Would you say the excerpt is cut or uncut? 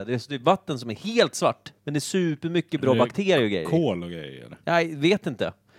cut